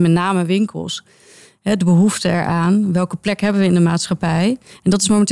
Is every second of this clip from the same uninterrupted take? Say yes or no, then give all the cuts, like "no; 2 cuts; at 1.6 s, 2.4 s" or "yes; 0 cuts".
yes; 0 cuts